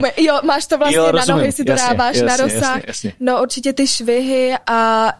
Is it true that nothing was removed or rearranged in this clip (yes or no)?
yes